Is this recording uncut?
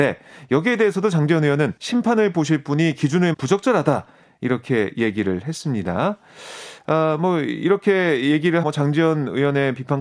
no; 3 cuts; at 1.8 s, 3.3 s, 8.6 s

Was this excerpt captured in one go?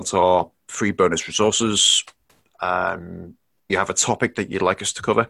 no; 1 cut; at 3.7 s

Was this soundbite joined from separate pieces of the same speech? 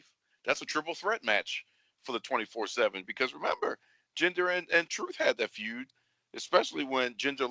no; 0 cuts

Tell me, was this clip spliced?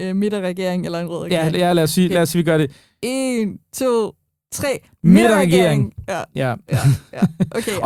no; 0 cuts

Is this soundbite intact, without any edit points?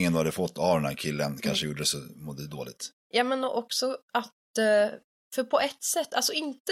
no; 3 cuts; at 3.0 s, 4.0 s, 5.1 s

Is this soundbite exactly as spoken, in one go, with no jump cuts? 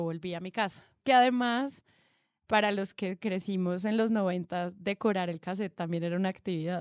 yes; 0 cuts

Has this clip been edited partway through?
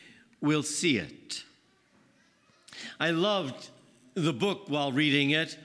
no; 0 cuts

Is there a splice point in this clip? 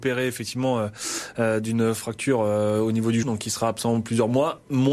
yes; 1 cut; at 3.2 s

